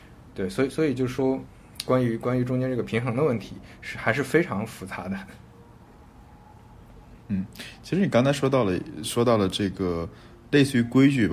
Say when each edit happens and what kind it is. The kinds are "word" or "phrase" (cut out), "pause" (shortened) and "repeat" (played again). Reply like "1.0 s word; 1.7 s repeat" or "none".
7.2 s pause